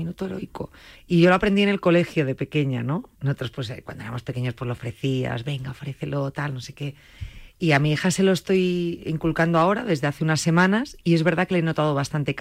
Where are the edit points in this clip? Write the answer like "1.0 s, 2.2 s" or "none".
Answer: 0.9 s, 3.1 s